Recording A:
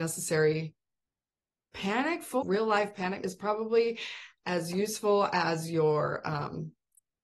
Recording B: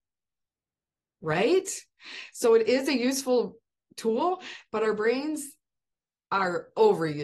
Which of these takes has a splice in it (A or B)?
A